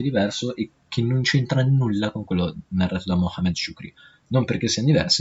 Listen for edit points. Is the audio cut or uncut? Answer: uncut